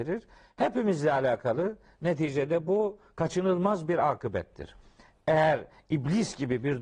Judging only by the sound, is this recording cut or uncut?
uncut